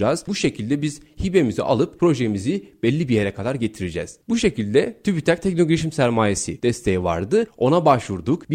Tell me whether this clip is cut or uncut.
uncut